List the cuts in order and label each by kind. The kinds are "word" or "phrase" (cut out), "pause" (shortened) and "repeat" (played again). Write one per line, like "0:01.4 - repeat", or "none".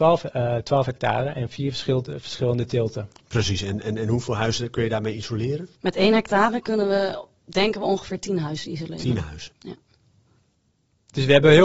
0:05.7 - pause